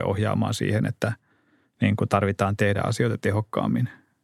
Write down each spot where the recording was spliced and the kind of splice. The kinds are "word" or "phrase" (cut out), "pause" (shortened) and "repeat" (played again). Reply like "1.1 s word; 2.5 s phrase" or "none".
none